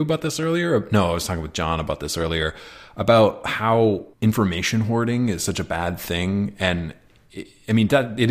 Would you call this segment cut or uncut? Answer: cut